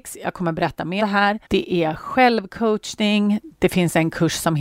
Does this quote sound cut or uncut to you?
cut